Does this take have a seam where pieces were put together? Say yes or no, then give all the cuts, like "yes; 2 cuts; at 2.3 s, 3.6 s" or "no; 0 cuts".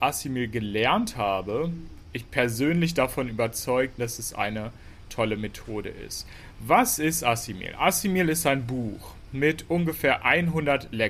yes; 2 cuts; at 2.0 s, 4.0 s